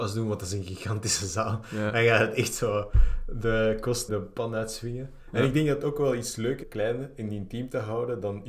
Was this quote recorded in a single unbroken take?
no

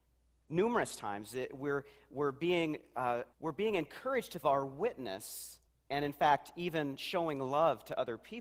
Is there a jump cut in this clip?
yes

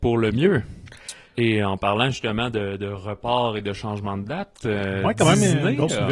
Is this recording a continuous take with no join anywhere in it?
yes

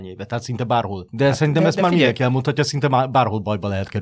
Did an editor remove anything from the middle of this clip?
no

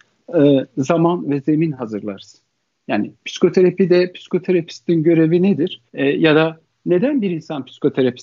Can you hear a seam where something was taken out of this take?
yes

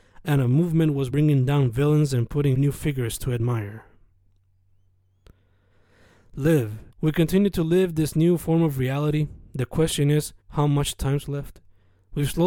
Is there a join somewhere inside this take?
yes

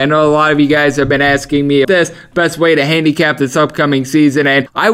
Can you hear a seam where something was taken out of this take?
yes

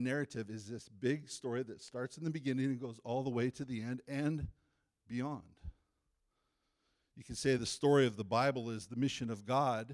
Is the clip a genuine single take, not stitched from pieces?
yes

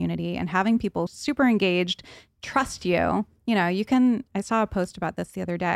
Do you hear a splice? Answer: yes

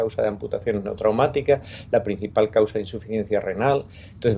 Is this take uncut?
yes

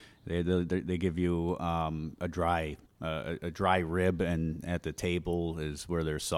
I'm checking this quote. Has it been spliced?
yes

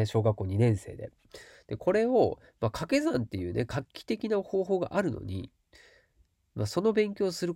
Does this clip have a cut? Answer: no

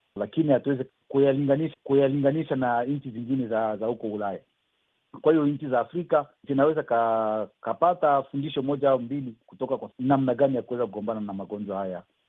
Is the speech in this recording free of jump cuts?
no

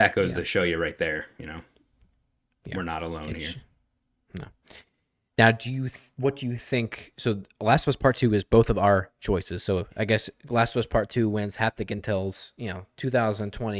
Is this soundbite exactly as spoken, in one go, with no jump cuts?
yes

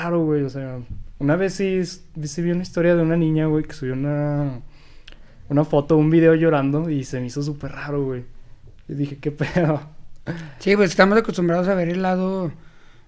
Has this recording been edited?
no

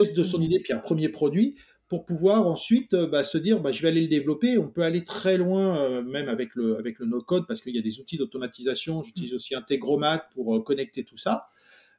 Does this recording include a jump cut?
no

